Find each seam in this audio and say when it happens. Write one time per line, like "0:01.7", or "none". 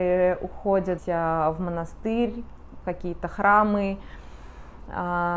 0:01.0
0:02.8